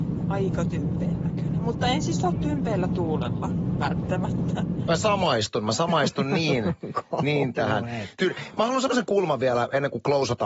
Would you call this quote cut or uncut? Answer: uncut